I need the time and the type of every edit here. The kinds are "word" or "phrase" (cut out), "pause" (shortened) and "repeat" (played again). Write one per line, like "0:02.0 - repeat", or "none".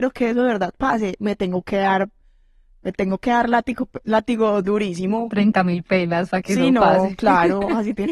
none